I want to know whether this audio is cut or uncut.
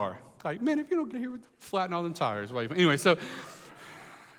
cut